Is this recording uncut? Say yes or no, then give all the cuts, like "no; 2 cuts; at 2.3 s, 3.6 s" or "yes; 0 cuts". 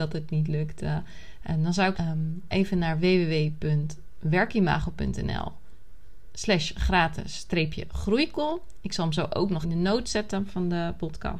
no; 3 cuts; at 1.9 s, 2.5 s, 9.6 s